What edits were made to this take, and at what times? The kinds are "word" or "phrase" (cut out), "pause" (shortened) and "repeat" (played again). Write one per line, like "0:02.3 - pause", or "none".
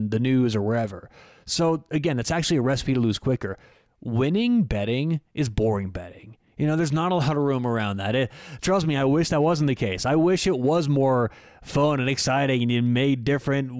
none